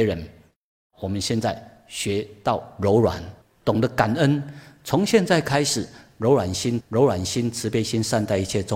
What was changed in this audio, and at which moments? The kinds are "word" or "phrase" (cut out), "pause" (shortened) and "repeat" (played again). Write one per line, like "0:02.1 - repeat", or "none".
0:03.4 - pause
0:06.8 - repeat